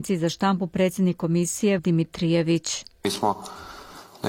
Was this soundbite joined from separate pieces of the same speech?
yes; 1 cut; at 1.8 s

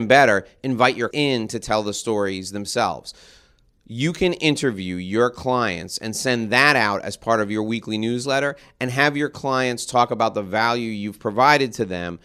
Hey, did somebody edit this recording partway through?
yes; 1 cut; at 1.1 s

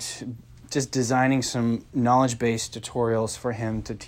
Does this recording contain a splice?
no; 0 cuts

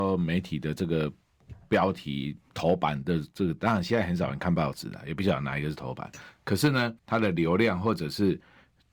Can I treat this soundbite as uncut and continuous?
no; 1 cut; at 7.0 s

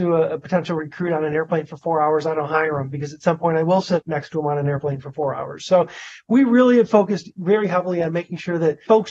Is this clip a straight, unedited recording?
yes; 0 cuts

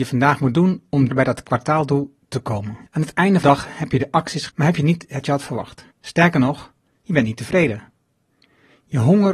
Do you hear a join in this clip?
yes; 6 cuts; at 1.1 s, 2.9 s, 3.4 s, 4.5 s, 5.2 s, 5.9 s

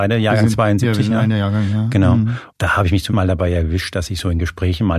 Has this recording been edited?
yes; 2 cuts; at 2.5 s, 3.1 s

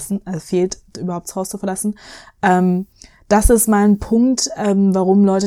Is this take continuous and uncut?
yes; 0 cuts

